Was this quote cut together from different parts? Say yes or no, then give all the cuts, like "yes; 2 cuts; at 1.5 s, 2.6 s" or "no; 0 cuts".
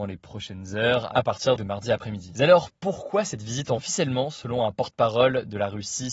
yes; 2 cuts; at 1.6 s, 3.8 s